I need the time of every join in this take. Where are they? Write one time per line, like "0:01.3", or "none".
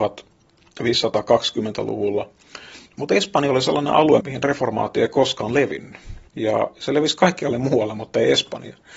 0:02.9
0:04.2
0:06.3

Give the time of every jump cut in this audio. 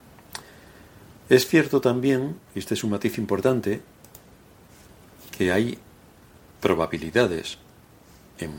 none

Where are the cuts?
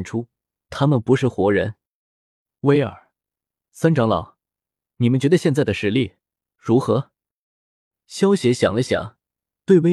none

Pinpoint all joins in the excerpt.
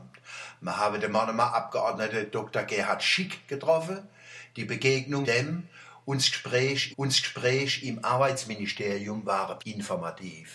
0:05.2
0:06.9
0:09.6

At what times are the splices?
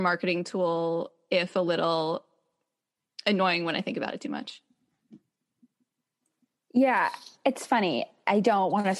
none

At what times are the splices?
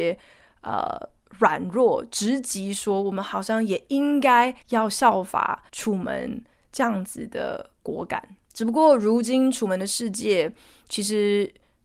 0:04.6
0:05.7
0:08.4

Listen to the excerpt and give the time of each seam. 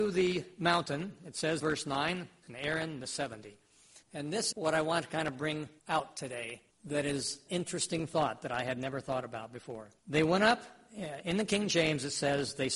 0:01.6
0:02.4
0:03.0
0:04.0
0:04.5
0:05.8
0:06.7
0:07.5
0:10.0

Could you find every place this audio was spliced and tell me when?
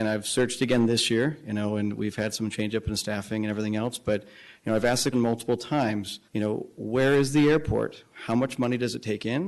0:05.1
0:06.3

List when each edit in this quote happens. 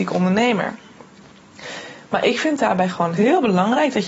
0:03.2

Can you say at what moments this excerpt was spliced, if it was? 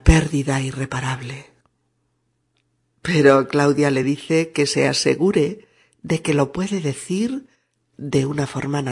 none

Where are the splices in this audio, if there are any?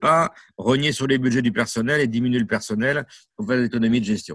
none

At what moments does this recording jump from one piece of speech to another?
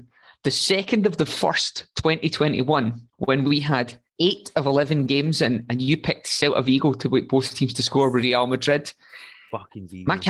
0:03.1
0:04.1

